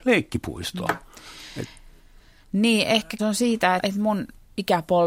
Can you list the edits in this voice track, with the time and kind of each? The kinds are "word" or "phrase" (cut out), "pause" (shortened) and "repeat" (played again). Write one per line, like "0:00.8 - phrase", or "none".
0:03.2 - word
0:03.8 - word

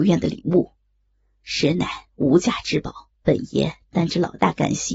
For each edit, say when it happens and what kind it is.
0:03.1 - pause

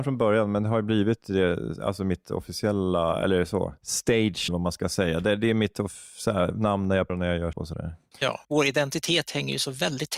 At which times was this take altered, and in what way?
0:04.5 - phrase
0:07.1 - word
0:07.5 - word
0:08.4 - pause

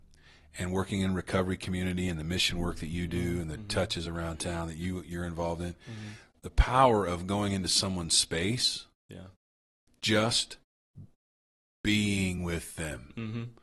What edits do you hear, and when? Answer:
none

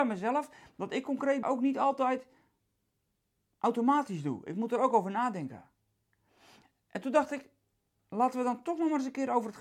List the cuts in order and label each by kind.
0:01.4 - word

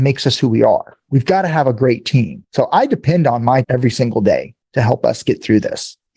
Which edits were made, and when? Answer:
0:03.6 - word
0:04.6 - pause

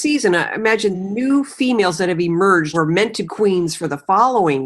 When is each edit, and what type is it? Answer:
0:00.9 - phrase
0:02.7 - word
0:03.3 - word

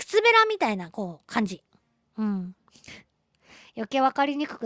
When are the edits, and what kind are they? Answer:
none

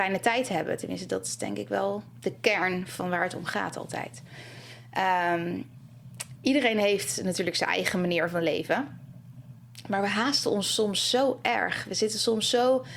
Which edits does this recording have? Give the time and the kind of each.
0:06.4 - word

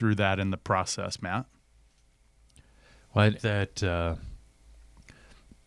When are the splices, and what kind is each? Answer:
0:03.4 - phrase

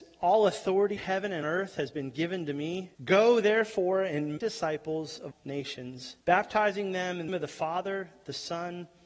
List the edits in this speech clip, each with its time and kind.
0:01.0 - word
0:01.4 - word
0:02.9 - pause
0:04.4 - word
0:05.3 - word
0:06.2 - pause
0:07.3 - word

